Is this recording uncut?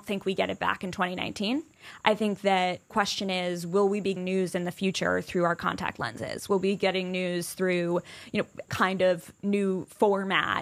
no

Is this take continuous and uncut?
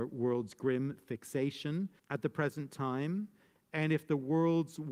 no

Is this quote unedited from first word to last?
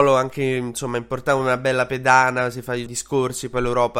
no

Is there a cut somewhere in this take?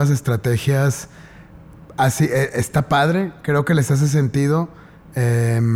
no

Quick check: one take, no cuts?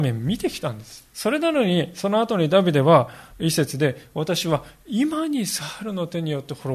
no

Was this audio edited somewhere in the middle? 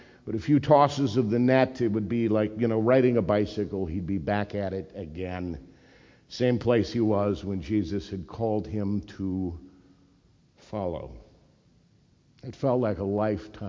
no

